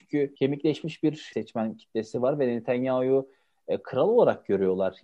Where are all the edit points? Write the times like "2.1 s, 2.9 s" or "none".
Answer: none